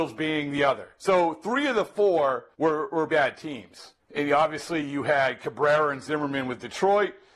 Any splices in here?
yes; 3 cuts; at 2.5 s, 3.1 s, 4.0 s

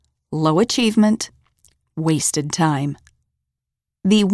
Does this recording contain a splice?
no; 0 cuts

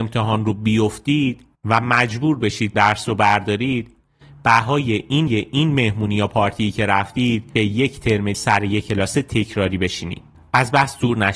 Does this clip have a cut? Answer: yes; 6 cuts; at 1.5 s, 2.7 s, 5.3 s, 7.6 s, 8.3 s, 10.3 s

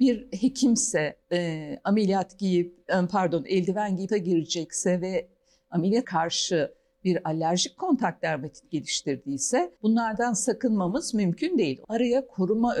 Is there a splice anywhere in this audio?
yes; 5 cuts; at 1.2 s, 4.1 s, 6.0 s, 9.8 s, 11.8 s

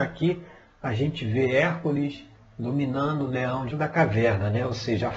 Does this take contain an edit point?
yes; 2 cuts; at 2.4 s, 3.7 s

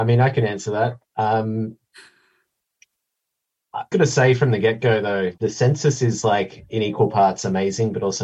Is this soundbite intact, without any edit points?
no; 2 cuts; at 3.9 s, 5.4 s

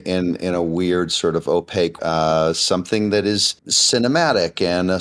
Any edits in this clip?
yes; 2 cuts; at 2.0 s, 3.6 s

